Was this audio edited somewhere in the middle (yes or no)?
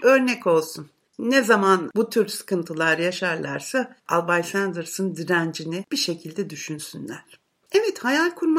no